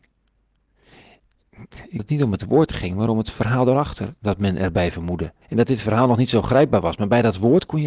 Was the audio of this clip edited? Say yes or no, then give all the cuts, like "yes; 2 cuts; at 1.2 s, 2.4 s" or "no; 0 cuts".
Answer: yes; 2 cuts; at 2.0 s, 5.4 s